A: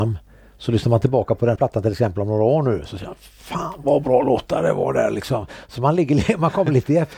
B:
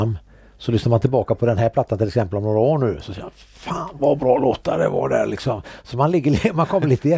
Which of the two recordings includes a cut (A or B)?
A